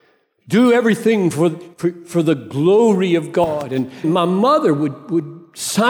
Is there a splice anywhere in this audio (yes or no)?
yes